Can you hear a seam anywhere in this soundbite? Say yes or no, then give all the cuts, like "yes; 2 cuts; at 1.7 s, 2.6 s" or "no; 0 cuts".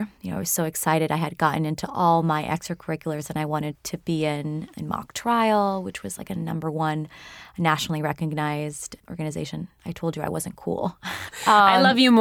yes; 1 cut; at 11.3 s